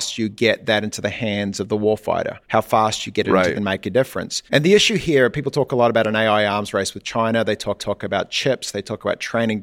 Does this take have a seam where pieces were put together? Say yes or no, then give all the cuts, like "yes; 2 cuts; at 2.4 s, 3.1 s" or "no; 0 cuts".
yes; 4 cuts; at 2.4 s, 3.6 s, 4.5 s, 7.8 s